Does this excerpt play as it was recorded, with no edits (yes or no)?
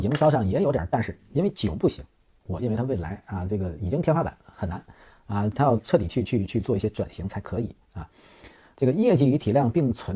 yes